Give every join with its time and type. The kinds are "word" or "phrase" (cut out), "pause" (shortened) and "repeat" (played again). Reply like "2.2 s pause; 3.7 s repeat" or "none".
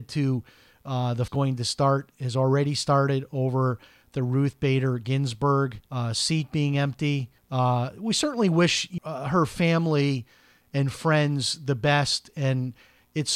1.3 s phrase; 5.9 s pause; 7.4 s pause; 9.0 s word